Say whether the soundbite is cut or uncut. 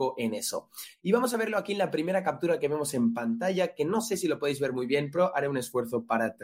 uncut